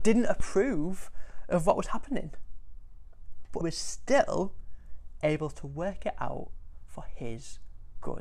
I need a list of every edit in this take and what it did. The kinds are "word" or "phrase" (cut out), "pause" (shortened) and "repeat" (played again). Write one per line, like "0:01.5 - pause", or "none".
0:03.6 - word